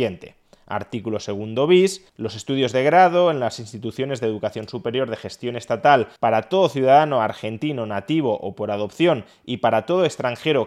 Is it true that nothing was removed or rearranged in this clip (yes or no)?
no